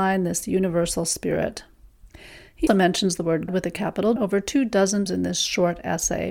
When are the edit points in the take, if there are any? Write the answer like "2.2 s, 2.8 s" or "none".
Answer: 2.7 s, 3.5 s, 4.2 s, 5.1 s